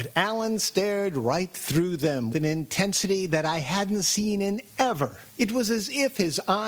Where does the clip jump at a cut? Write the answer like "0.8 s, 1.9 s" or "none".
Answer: 2.3 s, 4.7 s, 5.3 s